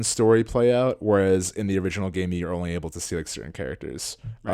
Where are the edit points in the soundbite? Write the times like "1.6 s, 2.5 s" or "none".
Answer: none

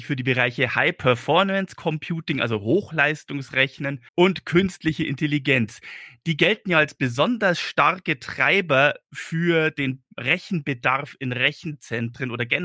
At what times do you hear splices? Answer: 4.1 s

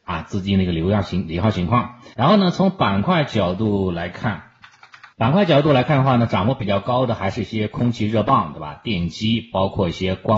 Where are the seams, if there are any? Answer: 2.1 s, 5.1 s

